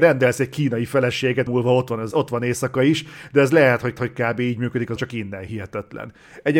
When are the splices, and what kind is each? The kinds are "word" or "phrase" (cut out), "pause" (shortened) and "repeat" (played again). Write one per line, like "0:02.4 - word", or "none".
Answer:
0:01.5 - phrase
0:02.1 - word
0:04.0 - repeat
0:05.0 - word